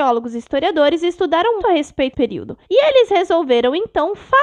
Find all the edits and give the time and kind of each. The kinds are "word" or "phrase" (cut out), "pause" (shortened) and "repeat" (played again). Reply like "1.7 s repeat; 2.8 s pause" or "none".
1.6 s word; 2.1 s word; 2.6 s pause